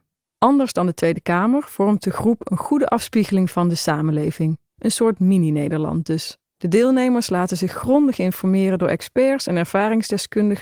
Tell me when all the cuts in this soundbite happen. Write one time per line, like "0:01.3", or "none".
0:04.7
0:06.5